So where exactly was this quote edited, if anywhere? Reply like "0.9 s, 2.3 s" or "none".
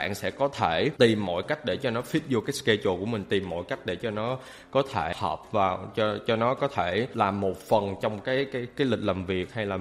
none